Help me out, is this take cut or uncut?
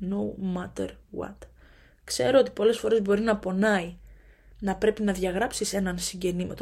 uncut